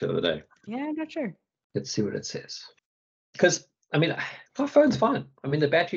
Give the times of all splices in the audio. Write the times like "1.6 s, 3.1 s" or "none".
none